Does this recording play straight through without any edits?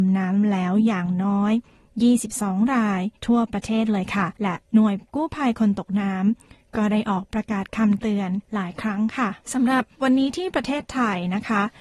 no; 4 cuts; at 3.2 s, 4.4 s, 8.4 s, 9.4 s

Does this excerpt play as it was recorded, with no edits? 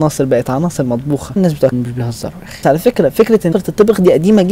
no; 4 cuts; at 1.4 s, 1.7 s, 2.6 s, 3.5 s

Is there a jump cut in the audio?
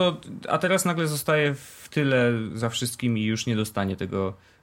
no; 0 cuts

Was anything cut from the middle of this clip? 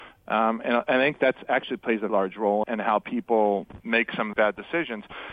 yes; 4 cuts; at 2.1 s, 2.6 s, 3.8 s, 4.3 s

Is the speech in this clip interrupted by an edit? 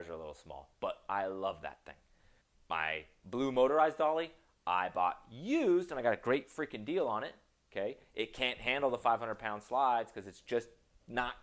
no; 0 cuts

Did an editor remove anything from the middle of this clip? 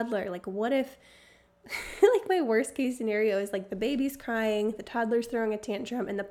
no; 0 cuts

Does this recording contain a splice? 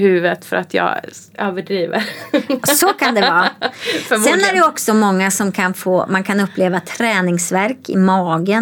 no; 0 cuts

